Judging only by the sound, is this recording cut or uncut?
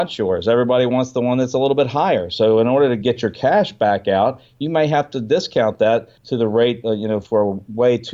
cut